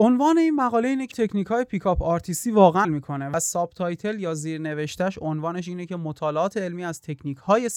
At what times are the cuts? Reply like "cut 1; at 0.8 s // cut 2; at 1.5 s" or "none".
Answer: cut 1; at 1.1 s // cut 2; at 2.8 s

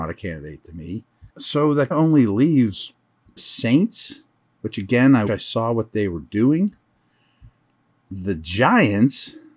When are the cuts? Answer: cut 1; at 1.3 s // cut 2; at 1.9 s // cut 3; at 3.4 s // cut 4; at 5.3 s

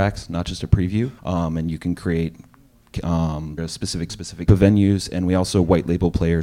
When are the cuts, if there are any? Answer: cut 1; at 1.2 s // cut 2; at 3.6 s // cut 3; at 4.1 s // cut 4; at 4.5 s

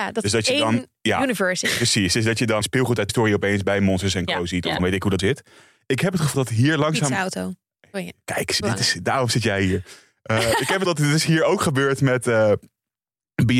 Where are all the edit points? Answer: cut 1; at 2.6 s // cut 2; at 3.1 s // cut 3; at 4.8 s // cut 4; at 5.2 s // cut 5; at 6.3 s // cut 6; at 8.6 s // cut 7; at 10.8 s

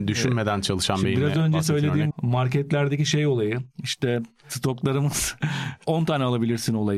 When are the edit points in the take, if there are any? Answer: cut 1; at 2.1 s // cut 2; at 5.4 s

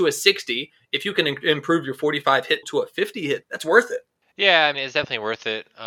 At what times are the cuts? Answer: cut 1; at 2.6 s // cut 2; at 3.4 s // cut 3; at 4.7 s

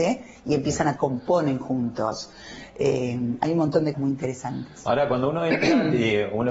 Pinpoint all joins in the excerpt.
cut 1; at 1.0 s // cut 2; at 3.9 s

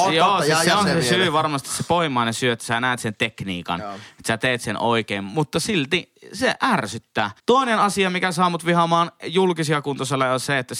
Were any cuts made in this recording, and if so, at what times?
cut 1; at 7.4 s

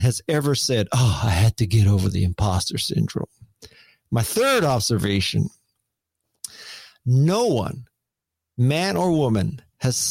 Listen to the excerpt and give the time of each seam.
none

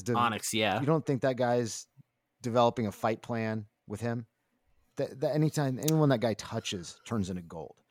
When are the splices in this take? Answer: none

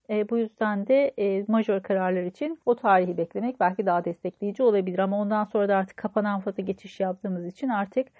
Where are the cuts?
cut 1; at 2.6 s

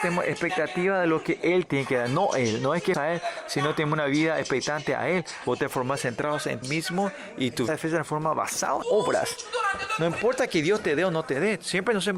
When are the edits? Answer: cut 1; at 1.7 s // cut 2; at 2.9 s // cut 3; at 6.6 s // cut 4; at 7.7 s // cut 5; at 8.8 s

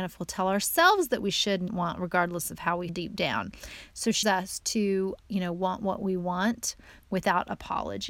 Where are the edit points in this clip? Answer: cut 1; at 1.2 s // cut 2; at 1.7 s // cut 3; at 2.9 s // cut 4; at 4.2 s // cut 5; at 5.2 s

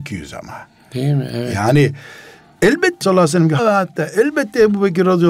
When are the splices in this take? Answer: cut 1; at 3.0 s // cut 2; at 3.6 s

